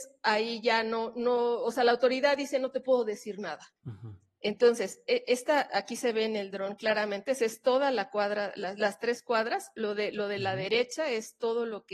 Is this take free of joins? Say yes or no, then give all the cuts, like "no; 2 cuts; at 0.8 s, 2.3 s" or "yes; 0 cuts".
no; 1 cut; at 3.8 s